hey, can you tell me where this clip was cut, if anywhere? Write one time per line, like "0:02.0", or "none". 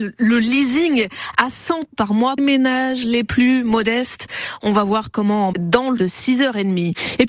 0:01.9
0:02.4
0:05.5
0:06.0